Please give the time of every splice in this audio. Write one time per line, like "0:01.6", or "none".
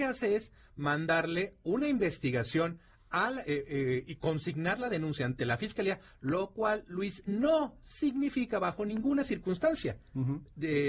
none